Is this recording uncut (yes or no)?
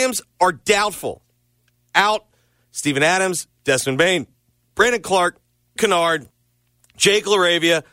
no